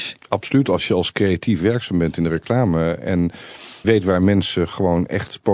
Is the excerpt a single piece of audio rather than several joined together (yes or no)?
no